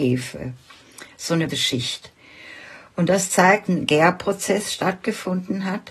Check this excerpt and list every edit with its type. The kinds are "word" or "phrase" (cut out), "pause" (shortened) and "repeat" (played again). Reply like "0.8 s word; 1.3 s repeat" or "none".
1.5 s word; 3.7 s phrase